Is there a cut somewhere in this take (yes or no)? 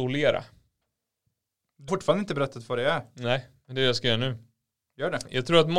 yes